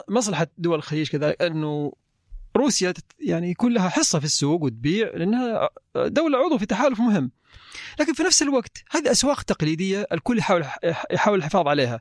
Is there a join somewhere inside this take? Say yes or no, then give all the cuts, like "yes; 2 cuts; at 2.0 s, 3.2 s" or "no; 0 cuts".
no; 0 cuts